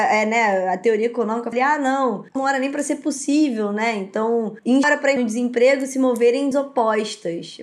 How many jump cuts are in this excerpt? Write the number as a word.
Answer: five